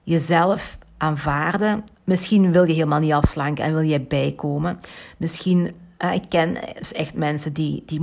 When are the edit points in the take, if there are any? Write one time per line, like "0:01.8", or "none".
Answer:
0:01.9